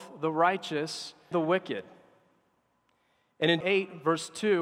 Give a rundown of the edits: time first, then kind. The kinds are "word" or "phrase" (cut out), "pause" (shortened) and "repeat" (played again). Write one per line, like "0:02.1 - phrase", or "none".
0:01.3 - word
0:03.6 - word